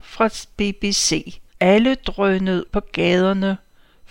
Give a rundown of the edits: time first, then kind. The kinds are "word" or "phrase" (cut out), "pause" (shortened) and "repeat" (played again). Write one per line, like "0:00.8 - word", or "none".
0:01.5 - pause
0:02.7 - word